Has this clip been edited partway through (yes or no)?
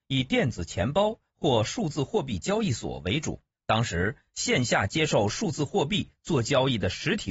yes